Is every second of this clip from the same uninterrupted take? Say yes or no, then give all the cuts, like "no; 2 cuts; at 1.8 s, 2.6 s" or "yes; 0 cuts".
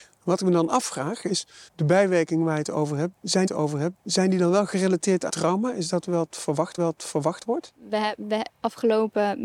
no; 5 cuts; at 1.7 s, 3.5 s, 5.3 s, 6.8 s, 8.5 s